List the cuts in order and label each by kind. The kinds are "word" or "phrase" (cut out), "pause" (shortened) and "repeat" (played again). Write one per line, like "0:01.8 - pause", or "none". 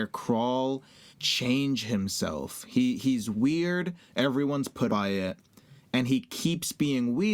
0:01.1 - word
0:04.9 - word